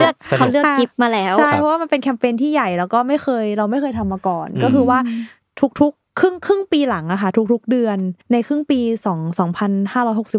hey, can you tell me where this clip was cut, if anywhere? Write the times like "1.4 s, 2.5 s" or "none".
6.1 s, 8.2 s